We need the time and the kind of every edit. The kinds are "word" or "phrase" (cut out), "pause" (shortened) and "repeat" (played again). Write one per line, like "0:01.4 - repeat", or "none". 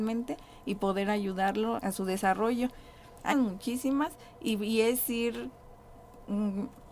0:01.8 - word
0:03.3 - word

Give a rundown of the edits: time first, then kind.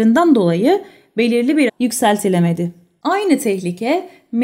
0:01.7 - phrase

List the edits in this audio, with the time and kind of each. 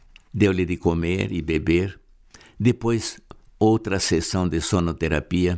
none

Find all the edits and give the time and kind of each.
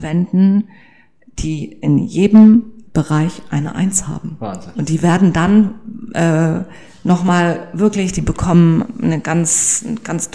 0:02.9 - pause

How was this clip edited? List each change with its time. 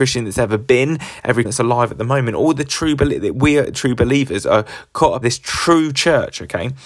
0:01.4 - word
0:05.2 - word

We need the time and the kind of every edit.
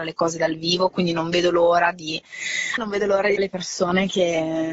0:02.8 - phrase
0:03.4 - word

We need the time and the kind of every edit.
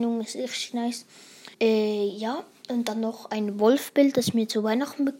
0:01.5 - pause

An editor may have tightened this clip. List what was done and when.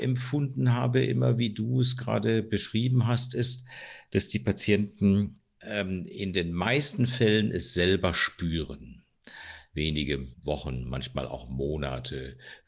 0:10.3 - pause

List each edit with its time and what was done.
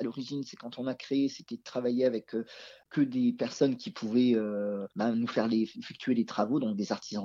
0:04.9 - pause

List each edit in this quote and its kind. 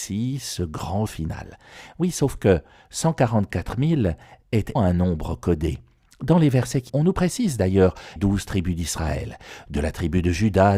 0:01.1 - word
0:04.8 - word
0:06.9 - word
0:08.2 - word

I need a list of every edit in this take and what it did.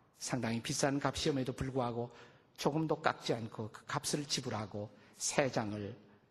none

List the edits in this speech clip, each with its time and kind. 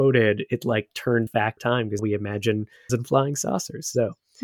0:01.3 - word
0:01.6 - word
0:02.0 - word
0:02.9 - word

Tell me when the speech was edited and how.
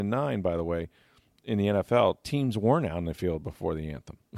none

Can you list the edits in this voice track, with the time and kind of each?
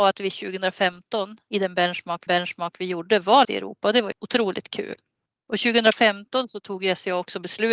0:02.3 - repeat
0:03.4 - word
0:04.1 - word

